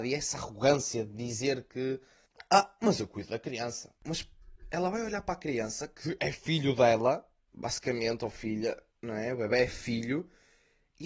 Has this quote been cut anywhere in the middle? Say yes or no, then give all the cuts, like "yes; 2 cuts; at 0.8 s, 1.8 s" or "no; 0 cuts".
yes; 2 cuts; at 4.0 s, 8.9 s